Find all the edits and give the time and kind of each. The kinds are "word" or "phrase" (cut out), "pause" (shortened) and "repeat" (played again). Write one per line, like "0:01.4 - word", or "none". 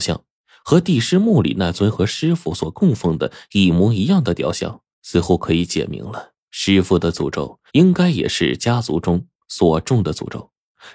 0:04.9 - pause
0:06.4 - pause
0:07.7 - pause